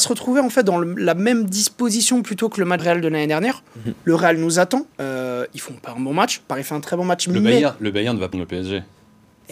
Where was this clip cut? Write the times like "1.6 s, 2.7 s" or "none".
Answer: 2.8 s, 4.9 s, 8.3 s